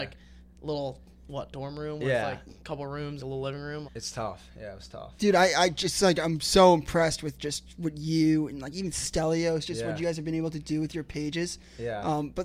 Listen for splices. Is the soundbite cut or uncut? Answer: cut